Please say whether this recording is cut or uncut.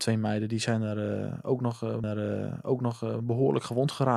cut